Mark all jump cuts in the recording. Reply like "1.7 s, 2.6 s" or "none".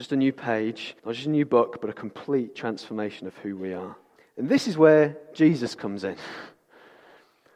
1.0 s, 4.2 s